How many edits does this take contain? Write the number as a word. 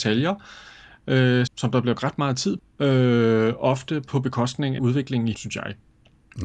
five